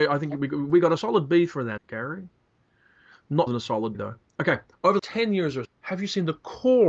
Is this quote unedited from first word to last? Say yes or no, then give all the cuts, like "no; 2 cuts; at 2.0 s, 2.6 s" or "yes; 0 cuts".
no; 6 cuts; at 1.0 s, 1.8 s, 3.5 s, 3.9 s, 5.0 s, 5.6 s